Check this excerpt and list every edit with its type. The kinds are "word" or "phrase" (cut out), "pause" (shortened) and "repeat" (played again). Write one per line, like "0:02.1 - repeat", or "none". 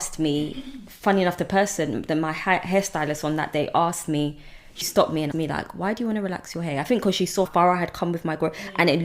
0:04.8 - word
0:05.3 - word
0:07.5 - word